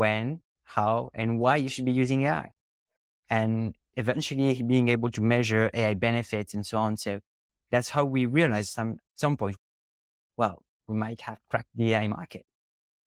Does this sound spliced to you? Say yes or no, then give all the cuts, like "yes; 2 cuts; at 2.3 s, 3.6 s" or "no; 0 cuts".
no; 0 cuts